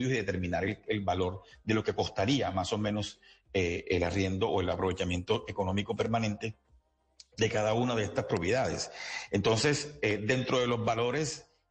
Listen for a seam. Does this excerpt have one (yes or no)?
no